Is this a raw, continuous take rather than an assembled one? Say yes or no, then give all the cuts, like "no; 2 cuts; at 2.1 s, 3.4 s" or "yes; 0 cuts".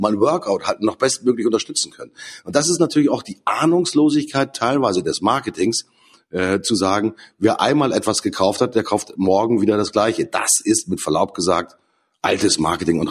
yes; 0 cuts